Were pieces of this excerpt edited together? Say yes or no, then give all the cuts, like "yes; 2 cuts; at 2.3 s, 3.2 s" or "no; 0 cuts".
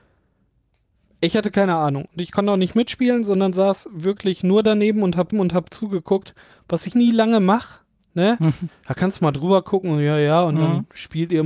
yes; 2 cuts; at 5.3 s, 6.9 s